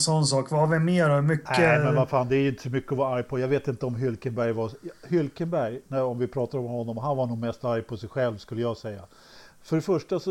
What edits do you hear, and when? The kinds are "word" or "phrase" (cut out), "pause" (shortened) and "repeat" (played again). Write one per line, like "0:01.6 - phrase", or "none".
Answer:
none